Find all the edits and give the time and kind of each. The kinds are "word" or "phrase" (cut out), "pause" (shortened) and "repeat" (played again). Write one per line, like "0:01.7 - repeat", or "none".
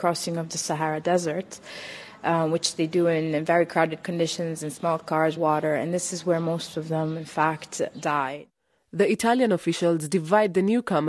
0:05.4 - phrase